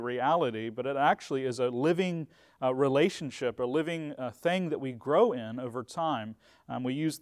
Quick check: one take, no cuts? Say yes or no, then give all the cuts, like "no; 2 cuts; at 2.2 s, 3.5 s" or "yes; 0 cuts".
yes; 0 cuts